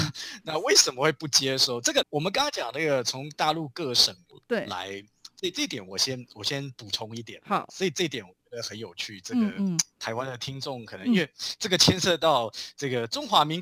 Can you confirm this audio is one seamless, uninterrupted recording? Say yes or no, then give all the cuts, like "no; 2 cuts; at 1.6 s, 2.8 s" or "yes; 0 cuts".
no; 1 cut; at 2.0 s